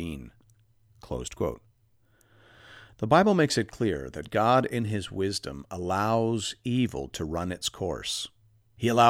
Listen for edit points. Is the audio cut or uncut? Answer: uncut